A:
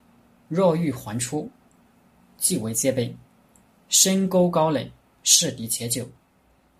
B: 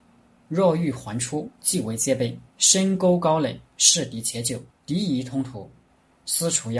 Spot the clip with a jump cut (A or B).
B